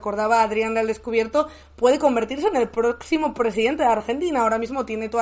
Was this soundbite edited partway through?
no; 0 cuts

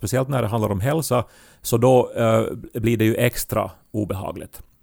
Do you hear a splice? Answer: no; 0 cuts

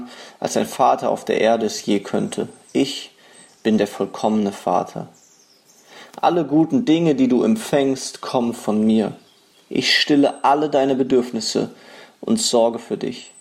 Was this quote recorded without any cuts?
yes; 0 cuts

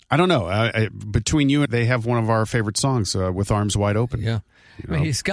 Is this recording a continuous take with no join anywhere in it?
no; 1 cut; at 1.7 s

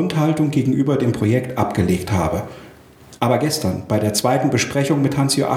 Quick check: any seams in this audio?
no; 0 cuts

